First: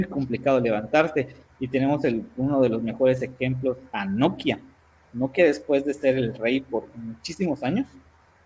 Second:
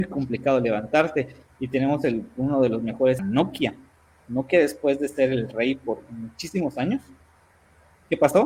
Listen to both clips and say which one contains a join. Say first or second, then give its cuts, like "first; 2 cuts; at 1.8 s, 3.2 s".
second; 1 cut; at 3.2 s